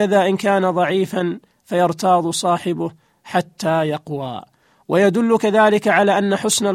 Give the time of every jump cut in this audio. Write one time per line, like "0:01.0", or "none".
none